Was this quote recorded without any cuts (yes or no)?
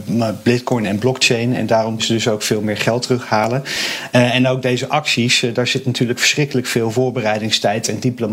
no